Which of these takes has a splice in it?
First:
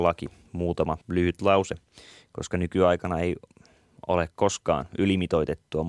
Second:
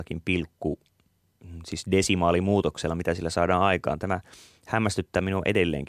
first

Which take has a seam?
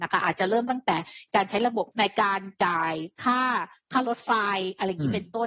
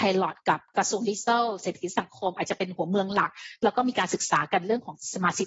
first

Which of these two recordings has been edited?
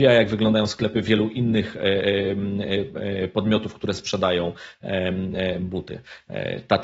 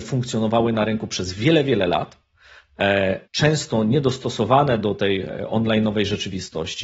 second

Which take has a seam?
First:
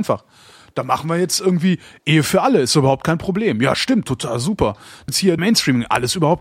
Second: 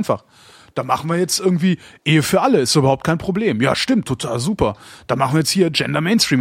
first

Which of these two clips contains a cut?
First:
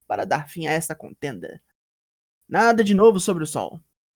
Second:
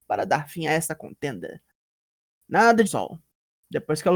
second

